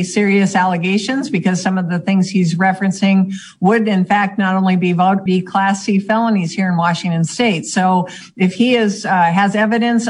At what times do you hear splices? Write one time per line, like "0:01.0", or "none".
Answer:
0:05.3